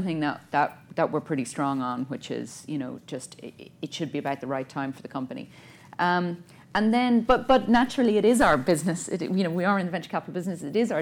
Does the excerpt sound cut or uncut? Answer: uncut